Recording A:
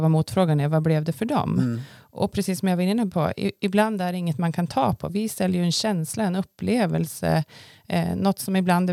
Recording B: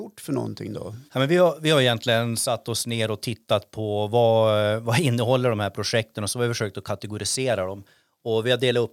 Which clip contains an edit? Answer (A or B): B